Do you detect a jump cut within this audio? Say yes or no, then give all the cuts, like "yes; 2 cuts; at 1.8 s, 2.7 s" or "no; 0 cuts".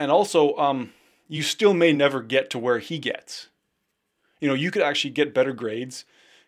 no; 0 cuts